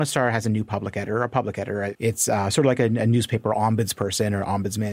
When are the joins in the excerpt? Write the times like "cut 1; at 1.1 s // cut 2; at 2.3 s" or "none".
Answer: none